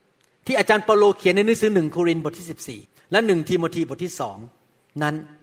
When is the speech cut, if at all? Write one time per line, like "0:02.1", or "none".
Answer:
0:02.8